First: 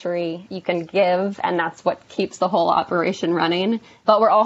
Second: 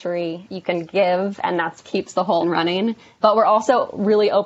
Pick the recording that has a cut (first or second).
second